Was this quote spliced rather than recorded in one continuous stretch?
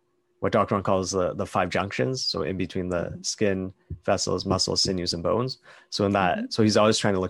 no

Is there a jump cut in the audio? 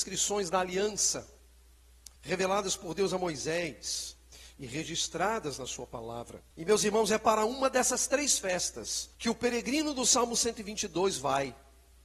yes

